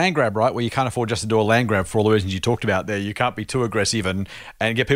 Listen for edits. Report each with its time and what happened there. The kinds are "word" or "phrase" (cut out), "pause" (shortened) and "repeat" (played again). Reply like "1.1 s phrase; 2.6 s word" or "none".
none